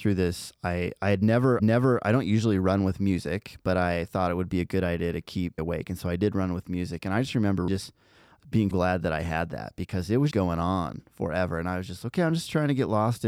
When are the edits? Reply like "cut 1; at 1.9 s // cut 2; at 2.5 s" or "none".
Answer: cut 1; at 1.6 s // cut 2; at 5.6 s // cut 3; at 7.7 s // cut 4; at 8.7 s // cut 5; at 10.3 s